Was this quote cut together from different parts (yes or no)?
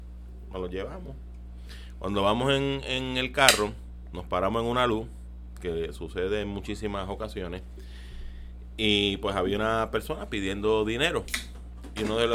no